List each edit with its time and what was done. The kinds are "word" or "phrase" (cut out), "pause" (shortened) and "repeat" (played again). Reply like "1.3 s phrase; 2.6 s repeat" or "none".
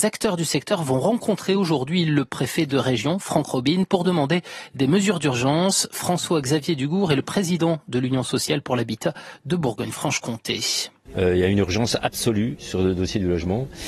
none